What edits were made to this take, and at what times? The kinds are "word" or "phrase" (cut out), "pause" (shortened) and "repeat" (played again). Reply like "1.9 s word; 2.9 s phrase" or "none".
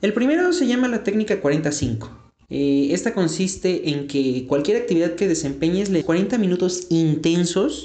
2.4 s pause; 6.0 s word